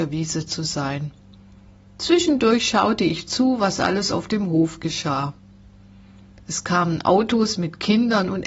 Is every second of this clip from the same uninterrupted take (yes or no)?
yes